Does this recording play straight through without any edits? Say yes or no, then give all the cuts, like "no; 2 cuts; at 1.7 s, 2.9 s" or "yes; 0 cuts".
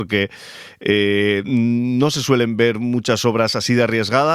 yes; 0 cuts